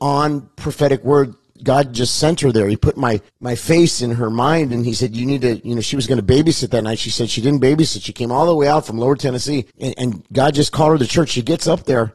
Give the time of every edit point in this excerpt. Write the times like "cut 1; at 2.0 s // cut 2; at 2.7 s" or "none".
cut 1; at 3.3 s // cut 2; at 9.7 s

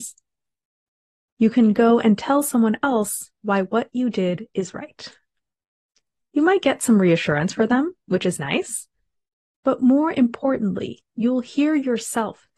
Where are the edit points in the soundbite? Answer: none

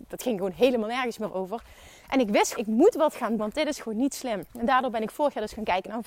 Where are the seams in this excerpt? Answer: cut 1; at 2.6 s // cut 2; at 3.4 s // cut 3; at 4.5 s

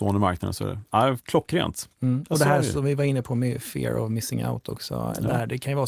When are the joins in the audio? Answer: none

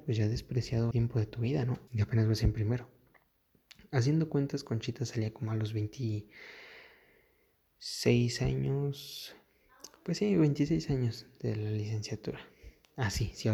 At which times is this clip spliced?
cut 1; at 0.9 s // cut 2; at 1.9 s

